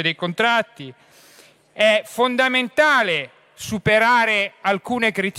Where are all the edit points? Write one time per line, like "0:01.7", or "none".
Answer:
none